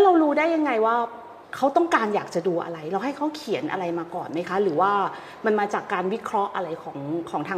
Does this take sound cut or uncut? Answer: cut